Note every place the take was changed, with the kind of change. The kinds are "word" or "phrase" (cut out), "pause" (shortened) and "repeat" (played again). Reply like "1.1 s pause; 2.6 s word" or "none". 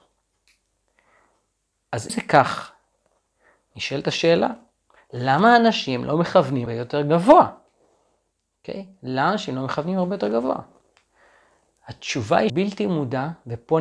2.1 s word; 6.7 s word; 12.5 s word